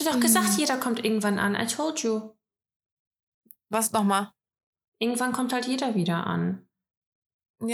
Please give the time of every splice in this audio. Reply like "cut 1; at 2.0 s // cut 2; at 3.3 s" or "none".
none